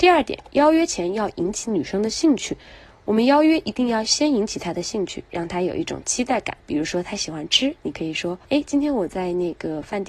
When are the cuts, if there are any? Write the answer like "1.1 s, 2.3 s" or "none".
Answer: 6.6 s, 8.4 s